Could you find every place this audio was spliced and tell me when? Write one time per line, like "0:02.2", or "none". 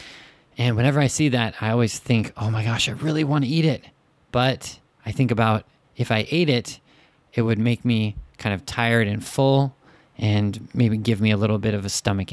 none